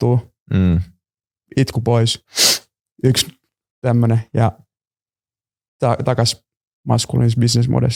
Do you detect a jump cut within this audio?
no; 0 cuts

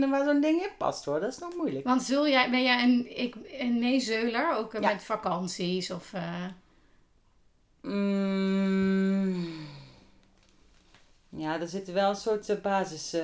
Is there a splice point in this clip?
no; 0 cuts

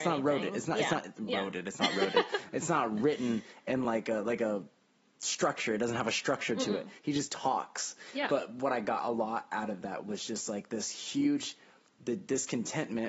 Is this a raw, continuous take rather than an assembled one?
yes; 0 cuts

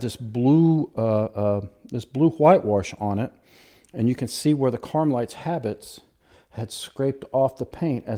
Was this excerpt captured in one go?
yes; 0 cuts

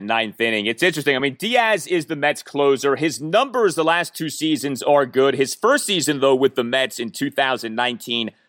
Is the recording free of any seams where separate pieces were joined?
yes; 0 cuts

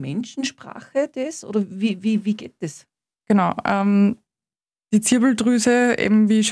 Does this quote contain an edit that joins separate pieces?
no; 0 cuts

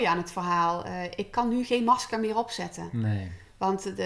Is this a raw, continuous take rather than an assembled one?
yes; 0 cuts

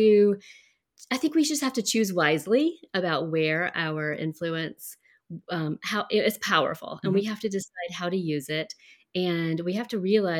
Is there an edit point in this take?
no; 0 cuts

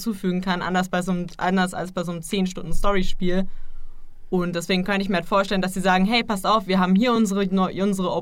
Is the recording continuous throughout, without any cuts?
yes; 0 cuts

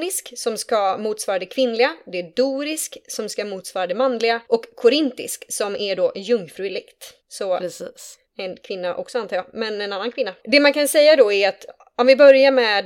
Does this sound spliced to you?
yes; 4 cuts; at 4.5 s, 7.2 s, 8.3 s, 10.4 s

